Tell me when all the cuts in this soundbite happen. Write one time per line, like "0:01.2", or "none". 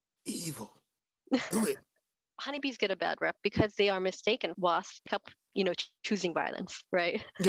0:04.5
0:05.1